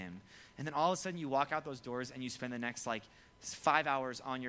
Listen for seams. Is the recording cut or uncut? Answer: uncut